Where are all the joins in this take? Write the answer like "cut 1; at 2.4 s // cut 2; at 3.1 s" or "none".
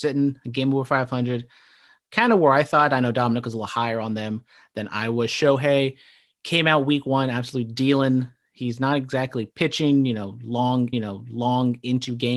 cut 1; at 10.9 s